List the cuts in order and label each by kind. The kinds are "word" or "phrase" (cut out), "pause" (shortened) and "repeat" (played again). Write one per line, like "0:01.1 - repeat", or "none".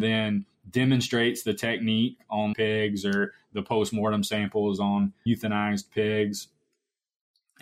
0:02.5 - word
0:05.3 - word